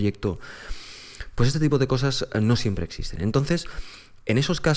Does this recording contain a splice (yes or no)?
no